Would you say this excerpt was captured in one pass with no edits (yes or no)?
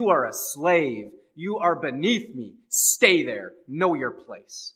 yes